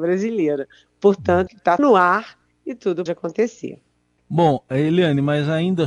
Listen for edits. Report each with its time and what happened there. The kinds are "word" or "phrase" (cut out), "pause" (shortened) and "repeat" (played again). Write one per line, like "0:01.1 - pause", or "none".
0:01.5 - word
0:01.8 - word
0:03.1 - word